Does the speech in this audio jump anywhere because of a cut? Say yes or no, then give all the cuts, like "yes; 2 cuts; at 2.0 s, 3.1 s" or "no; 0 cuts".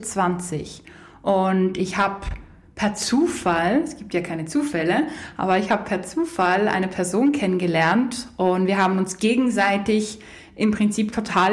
no; 0 cuts